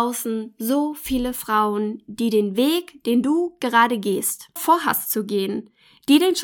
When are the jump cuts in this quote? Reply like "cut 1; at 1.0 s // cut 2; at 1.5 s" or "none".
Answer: cut 1; at 4.6 s